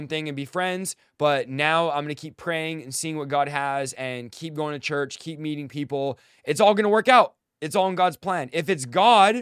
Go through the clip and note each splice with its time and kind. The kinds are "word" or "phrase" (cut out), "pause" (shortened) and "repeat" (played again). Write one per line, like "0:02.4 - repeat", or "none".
none